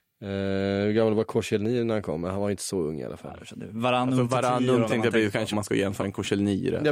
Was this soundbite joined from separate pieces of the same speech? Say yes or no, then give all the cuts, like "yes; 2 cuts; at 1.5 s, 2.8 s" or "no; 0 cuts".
yes; 3 cuts; at 4.9 s, 5.5 s, 6.0 s